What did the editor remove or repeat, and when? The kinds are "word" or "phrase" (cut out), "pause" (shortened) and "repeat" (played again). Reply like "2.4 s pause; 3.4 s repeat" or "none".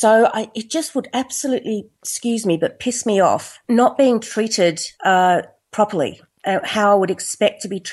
1.9 s pause; 3.6 s pause; 4.9 s pause